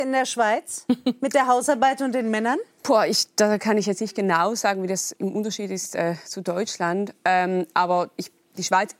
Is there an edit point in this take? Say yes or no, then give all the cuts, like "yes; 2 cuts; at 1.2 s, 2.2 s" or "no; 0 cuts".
no; 0 cuts